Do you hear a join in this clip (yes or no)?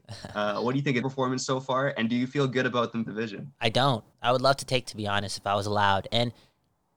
yes